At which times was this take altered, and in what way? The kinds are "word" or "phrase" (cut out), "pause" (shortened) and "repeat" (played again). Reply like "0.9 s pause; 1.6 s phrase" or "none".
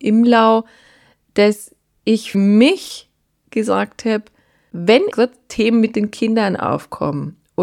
2.3 s word; 5.1 s word